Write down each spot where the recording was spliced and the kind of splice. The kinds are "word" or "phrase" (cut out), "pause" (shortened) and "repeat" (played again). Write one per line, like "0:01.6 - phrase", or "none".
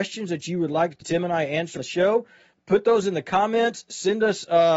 0:01.0 - word
0:01.8 - word
0:02.5 - word